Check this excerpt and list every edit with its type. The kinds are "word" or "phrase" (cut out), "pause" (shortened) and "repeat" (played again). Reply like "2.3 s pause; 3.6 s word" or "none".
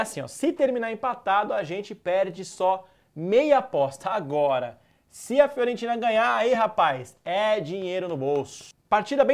none